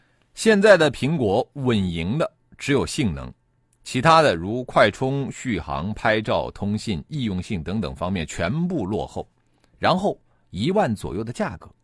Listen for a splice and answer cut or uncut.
uncut